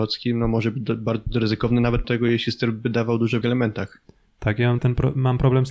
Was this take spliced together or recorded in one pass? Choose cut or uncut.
cut